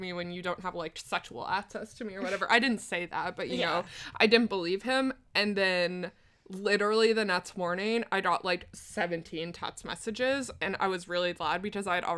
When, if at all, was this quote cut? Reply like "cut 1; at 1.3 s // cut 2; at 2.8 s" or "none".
none